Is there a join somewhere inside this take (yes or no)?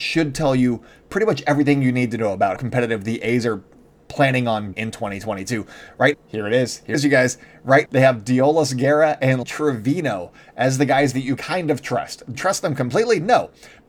yes